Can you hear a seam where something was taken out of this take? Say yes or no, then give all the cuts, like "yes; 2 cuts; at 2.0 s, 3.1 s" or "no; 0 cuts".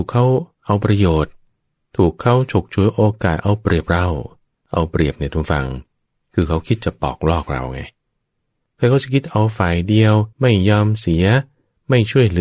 yes; 2 cuts; at 4.5 s, 10.3 s